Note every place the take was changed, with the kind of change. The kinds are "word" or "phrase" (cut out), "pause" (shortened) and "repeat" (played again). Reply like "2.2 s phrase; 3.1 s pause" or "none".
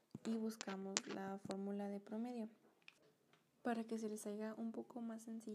none